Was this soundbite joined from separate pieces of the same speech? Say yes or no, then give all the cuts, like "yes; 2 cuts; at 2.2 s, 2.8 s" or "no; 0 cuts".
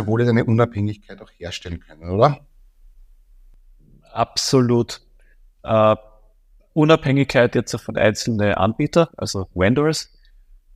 no; 0 cuts